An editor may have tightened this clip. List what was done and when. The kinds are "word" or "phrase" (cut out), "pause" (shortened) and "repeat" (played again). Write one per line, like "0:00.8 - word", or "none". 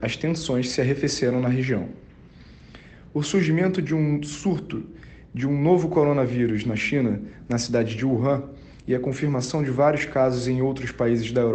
none

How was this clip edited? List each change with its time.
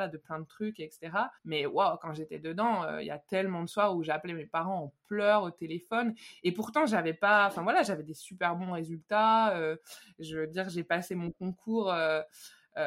0:01.4 - pause

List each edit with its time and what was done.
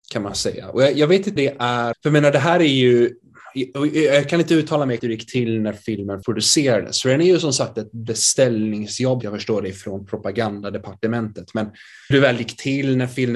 0:01.4 - word
0:01.9 - word
0:05.0 - word
0:06.2 - word
0:09.2 - word
0:12.1 - word

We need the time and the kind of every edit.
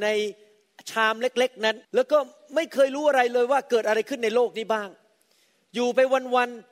0:01.8 - pause

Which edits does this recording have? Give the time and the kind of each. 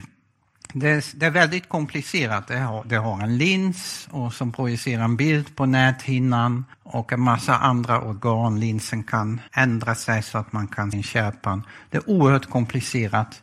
0:06.7 - pause
0:09.5 - pause
0:10.9 - word

